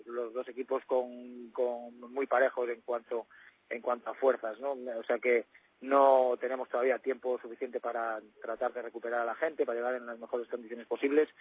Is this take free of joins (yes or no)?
yes